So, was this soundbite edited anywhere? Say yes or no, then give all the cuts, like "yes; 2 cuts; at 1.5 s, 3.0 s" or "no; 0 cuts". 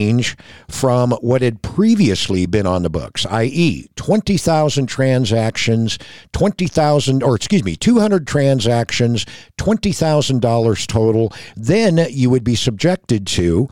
no; 0 cuts